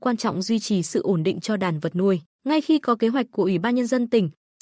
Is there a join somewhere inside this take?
yes; 1 cut; at 2.3 s

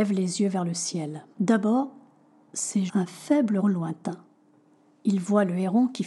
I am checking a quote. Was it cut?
yes; 3 cuts; at 1.3 s, 2.9 s, 3.6 s

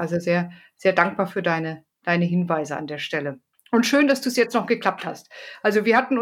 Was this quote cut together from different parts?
yes; 1 cut; at 3.5 s

